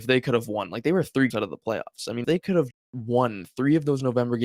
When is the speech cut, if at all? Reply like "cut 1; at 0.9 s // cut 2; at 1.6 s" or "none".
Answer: cut 1; at 1.3 s // cut 2; at 2.2 s // cut 3; at 2.7 s

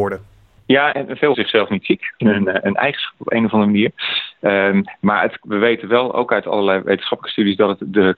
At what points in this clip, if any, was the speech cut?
cut 1; at 0.9 s // cut 2; at 1.3 s // cut 3; at 2.2 s

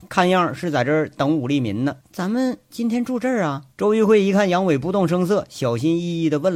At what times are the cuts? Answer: cut 1; at 2.0 s // cut 2; at 3.7 s

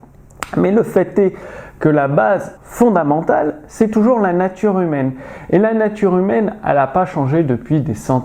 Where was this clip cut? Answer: cut 1; at 2.6 s

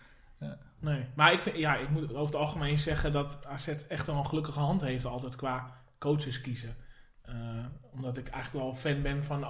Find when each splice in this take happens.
none

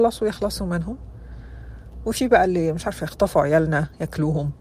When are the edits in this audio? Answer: none

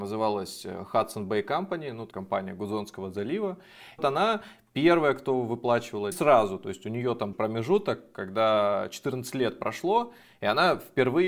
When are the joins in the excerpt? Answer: cut 1; at 2.1 s // cut 2; at 4.0 s // cut 3; at 6.1 s // cut 4; at 7.3 s

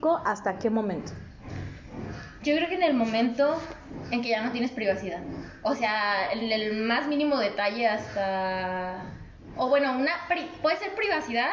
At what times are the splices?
none

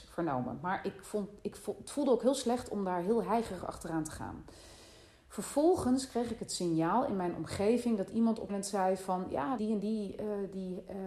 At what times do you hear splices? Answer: cut 1; at 8.5 s // cut 2; at 9.6 s

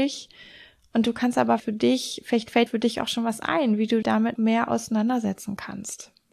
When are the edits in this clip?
cut 1; at 1.6 s // cut 2; at 2.7 s // cut 3; at 4.0 s // cut 4; at 4.4 s

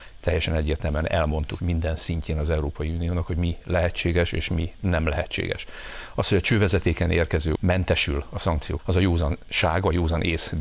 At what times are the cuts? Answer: cut 1; at 1.6 s // cut 2; at 7.5 s // cut 3; at 8.8 s

